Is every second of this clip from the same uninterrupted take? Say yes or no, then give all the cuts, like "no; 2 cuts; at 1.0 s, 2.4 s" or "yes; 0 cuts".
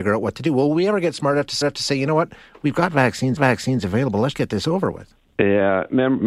no; 3 cuts; at 1.6 s, 3.4 s, 4.3 s